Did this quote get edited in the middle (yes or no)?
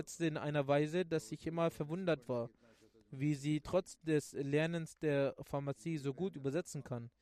no